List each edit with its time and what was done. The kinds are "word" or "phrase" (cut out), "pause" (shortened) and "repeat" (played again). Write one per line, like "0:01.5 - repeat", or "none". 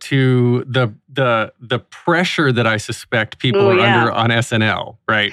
none

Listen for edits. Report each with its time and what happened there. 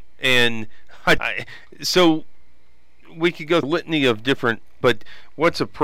0:01.2 - word
0:03.6 - word
0:04.8 - word

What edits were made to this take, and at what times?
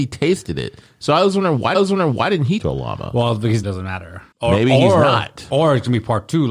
0:01.7 - repeat
0:02.6 - phrase
0:03.6 - phrase
0:04.3 - pause

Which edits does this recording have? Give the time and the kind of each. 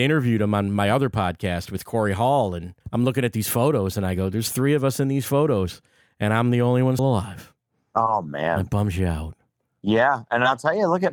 0:02.8 - pause
0:07.0 - word

